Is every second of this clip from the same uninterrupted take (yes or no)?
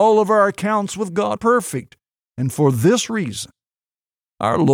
no